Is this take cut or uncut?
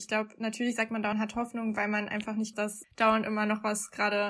cut